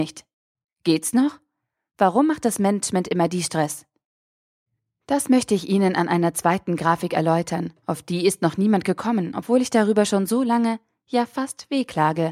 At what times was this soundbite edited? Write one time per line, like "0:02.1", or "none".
none

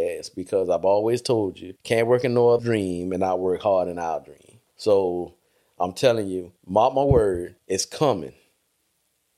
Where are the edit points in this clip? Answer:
0:01.8
0:02.6
0:04.7
0:06.6
0:07.6

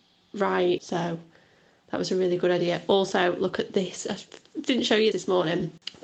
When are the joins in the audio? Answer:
0:05.1

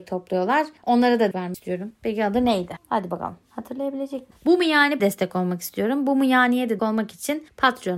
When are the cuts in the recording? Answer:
0:01.3
0:05.0
0:06.8

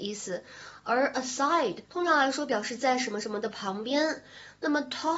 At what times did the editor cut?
0:01.8

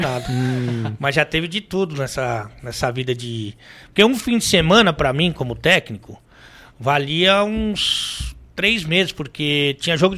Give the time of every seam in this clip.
none

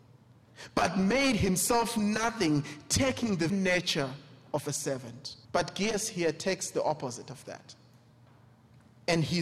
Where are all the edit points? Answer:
0:03.5
0:05.4

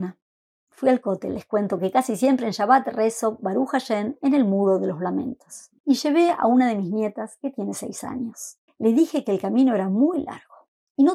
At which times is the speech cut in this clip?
0:05.8
0:08.7

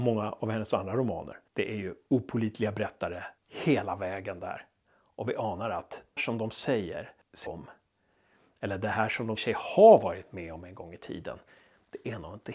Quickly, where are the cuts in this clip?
0:01.5
0:03.4
0:06.2
0:07.5
0:09.4

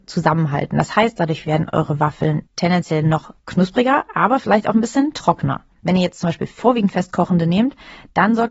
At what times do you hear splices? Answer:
0:02.5
0:03.4
0:05.7

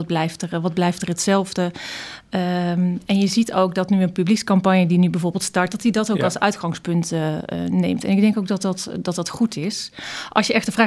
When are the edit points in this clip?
none

